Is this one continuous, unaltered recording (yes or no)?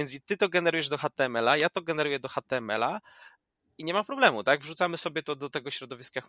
yes